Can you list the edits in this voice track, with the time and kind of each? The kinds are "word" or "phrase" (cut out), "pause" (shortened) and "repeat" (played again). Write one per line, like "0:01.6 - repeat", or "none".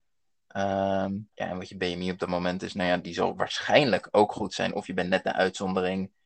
0:01.3 - pause